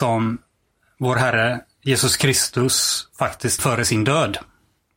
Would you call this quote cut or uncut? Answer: cut